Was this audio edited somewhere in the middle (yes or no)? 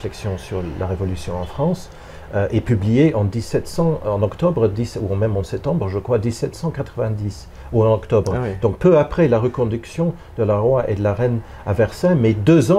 no